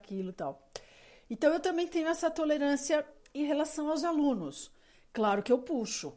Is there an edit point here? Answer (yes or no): no